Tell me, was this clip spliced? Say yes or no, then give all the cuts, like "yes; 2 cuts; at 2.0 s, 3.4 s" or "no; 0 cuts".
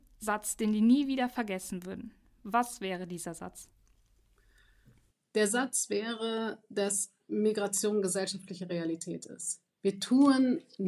no; 0 cuts